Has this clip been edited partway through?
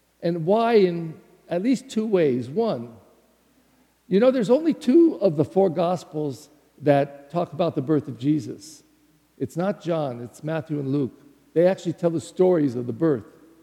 no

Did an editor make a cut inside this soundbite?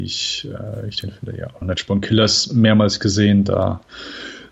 yes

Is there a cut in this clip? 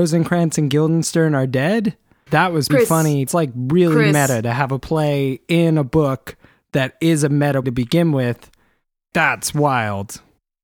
yes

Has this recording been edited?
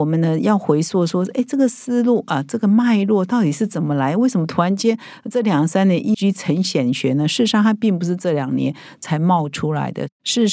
yes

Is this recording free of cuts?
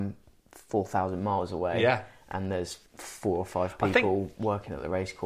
no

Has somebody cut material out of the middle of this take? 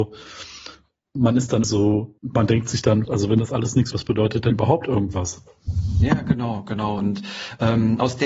yes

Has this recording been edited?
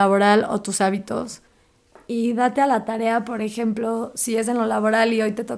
no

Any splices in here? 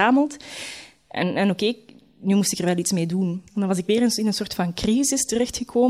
yes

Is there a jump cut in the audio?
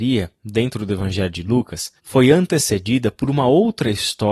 yes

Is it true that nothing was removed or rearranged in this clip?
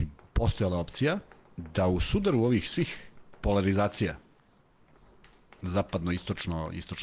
yes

